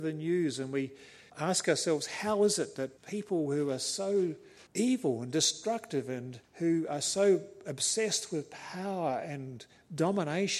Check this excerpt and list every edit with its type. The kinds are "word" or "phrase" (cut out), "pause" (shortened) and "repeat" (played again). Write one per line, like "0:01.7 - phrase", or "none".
0:01.3 - pause
0:03.0 - pause
0:04.7 - pause
0:06.4 - pause